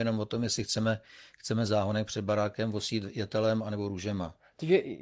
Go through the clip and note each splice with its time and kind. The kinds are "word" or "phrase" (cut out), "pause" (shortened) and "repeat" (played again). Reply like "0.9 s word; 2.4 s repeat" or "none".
none